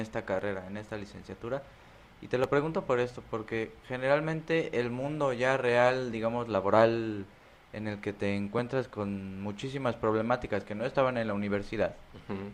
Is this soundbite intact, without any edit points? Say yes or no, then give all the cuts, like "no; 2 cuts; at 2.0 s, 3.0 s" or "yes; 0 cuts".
yes; 0 cuts